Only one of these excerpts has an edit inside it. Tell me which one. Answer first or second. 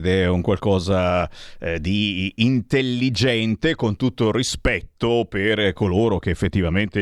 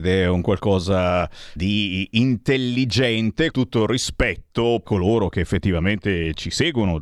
second